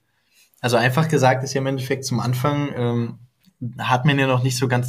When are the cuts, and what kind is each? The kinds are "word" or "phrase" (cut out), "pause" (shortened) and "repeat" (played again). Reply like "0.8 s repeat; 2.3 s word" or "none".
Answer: none